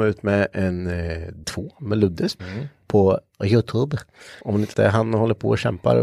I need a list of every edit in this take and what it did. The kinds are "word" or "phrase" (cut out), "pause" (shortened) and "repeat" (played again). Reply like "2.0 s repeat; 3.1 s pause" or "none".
1.4 s word; 2.4 s word; 4.4 s pause; 4.7 s word

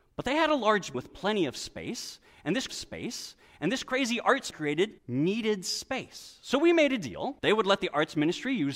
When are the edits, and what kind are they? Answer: 0.9 s word; 2.7 s repeat; 4.5 s phrase; 5.0 s pause; 7.4 s pause

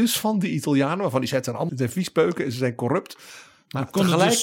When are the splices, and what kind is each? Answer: 1.7 s word

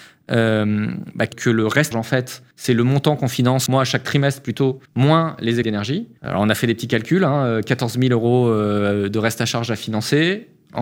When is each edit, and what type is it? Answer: 1.3 s word; 1.9 s phrase; 2.5 s pause; 3.7 s word; 4.9 s pause; 5.6 s word; 6.2 s pause

